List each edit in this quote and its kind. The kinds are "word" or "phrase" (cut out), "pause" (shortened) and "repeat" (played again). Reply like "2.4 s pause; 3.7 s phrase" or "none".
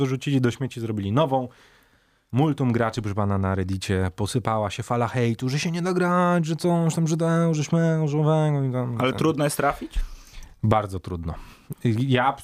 none